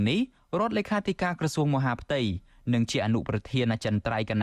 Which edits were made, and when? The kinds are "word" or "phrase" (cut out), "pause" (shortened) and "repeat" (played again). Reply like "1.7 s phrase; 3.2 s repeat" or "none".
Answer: none